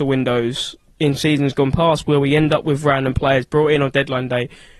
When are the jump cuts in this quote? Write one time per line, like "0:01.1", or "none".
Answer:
none